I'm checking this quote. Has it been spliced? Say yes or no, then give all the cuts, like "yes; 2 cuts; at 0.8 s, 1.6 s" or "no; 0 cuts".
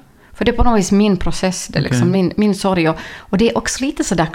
no; 0 cuts